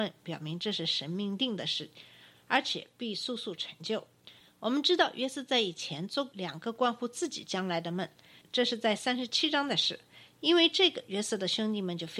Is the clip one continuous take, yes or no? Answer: yes